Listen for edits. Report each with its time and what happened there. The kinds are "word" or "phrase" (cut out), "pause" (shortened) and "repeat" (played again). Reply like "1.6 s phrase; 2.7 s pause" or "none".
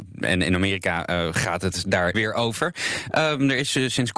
2.1 s word